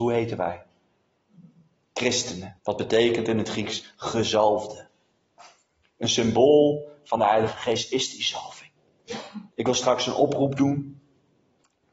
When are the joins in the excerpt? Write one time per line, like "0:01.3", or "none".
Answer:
0:02.6
0:09.5